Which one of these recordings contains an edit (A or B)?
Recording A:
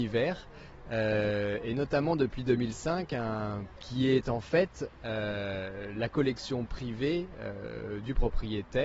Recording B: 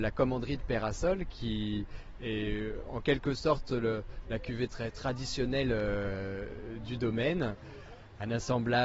A